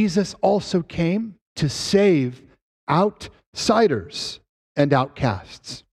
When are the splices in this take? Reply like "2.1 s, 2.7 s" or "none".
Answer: 1.4 s